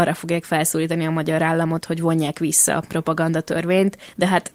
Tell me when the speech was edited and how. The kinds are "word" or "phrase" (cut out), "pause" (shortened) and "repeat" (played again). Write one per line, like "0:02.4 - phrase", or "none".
none